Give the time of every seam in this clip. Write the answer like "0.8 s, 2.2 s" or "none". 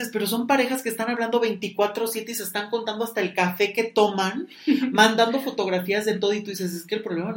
none